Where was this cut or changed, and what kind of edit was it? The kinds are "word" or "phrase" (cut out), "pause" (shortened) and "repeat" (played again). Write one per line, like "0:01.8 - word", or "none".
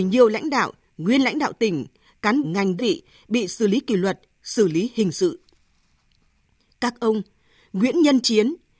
0:02.4 - phrase
0:02.8 - word

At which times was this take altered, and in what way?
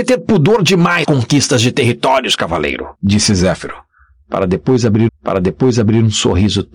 0:01.0 - phrase
0:02.9 - pause
0:05.1 - repeat

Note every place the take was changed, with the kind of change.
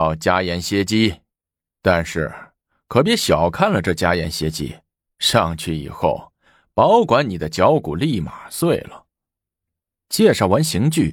none

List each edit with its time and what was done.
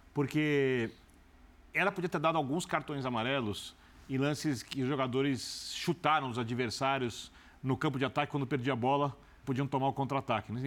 0:09.4 - word

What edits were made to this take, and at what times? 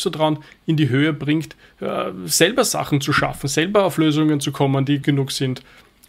0:05.0 - word

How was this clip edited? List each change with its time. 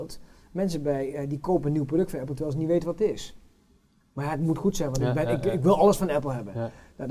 none

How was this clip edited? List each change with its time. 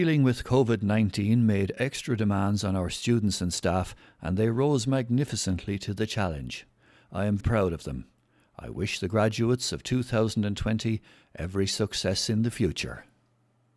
0:07.4 - word

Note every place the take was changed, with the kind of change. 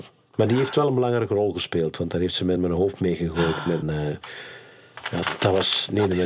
0:02.6 - word
0:03.8 - word

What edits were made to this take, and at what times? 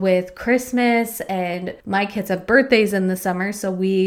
0:01.8 - pause

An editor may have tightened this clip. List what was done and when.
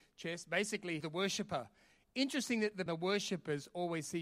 0:01.0 - word
0:02.9 - phrase

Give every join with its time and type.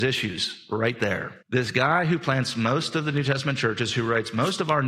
0:01.4 - pause

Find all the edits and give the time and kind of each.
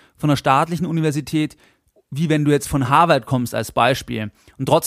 none

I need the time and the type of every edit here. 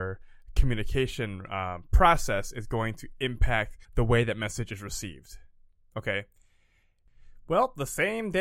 0:03.8 - pause

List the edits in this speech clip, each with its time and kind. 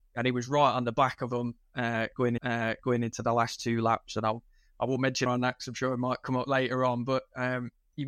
0:02.4 - repeat
0:05.3 - phrase

